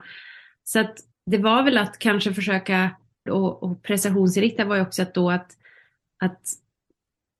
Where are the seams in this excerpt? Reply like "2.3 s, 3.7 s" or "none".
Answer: 1.1 s, 3.3 s